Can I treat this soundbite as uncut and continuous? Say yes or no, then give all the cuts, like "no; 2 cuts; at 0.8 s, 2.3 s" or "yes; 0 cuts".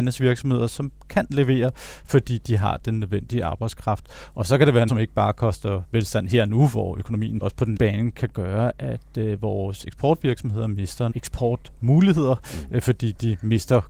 no; 4 cuts; at 4.9 s, 7.4 s, 7.8 s, 11.1 s